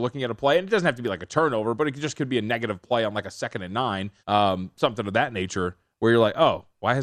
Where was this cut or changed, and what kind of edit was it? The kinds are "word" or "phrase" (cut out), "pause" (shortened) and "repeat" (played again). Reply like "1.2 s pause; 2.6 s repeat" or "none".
4.2 s pause